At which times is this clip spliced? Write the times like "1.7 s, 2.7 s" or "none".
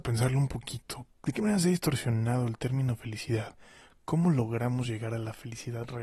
none